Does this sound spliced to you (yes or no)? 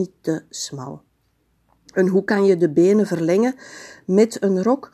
no